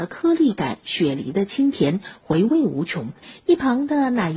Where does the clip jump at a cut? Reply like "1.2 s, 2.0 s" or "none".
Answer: none

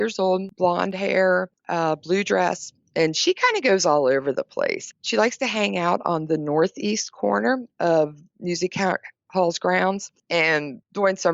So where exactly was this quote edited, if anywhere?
7.7 s

